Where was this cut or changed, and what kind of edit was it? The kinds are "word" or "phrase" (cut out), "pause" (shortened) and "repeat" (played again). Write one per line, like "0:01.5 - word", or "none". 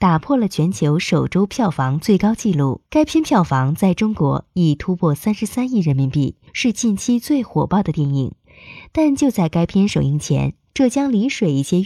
0:02.9 - pause
0:06.5 - pause